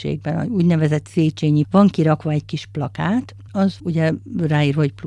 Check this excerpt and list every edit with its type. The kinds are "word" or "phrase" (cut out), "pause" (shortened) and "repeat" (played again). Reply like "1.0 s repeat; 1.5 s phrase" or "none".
1.6 s word; 3.5 s word; 3.8 s word